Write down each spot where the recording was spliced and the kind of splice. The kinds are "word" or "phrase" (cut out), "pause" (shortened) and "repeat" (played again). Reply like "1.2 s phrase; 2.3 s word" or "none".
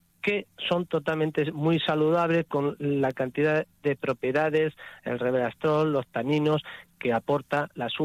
none